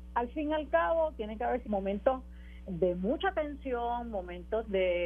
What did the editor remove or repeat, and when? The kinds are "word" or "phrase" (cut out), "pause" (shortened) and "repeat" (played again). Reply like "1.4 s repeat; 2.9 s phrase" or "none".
1.6 s word; 2.7 s word